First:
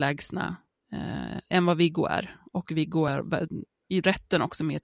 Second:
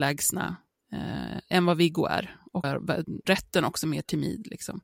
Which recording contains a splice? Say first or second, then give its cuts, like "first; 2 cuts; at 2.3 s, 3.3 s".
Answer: second; 2 cuts; at 2.6 s, 3.2 s